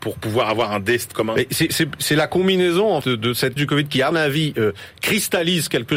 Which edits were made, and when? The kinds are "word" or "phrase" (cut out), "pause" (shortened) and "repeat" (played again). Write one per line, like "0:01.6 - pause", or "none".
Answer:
0:01.1 - word
0:01.7 - word
0:03.0 - word
0:03.6 - word
0:04.1 - word